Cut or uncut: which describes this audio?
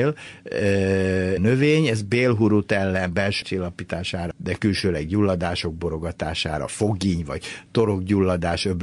cut